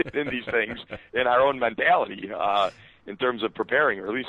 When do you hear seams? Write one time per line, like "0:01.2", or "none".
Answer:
none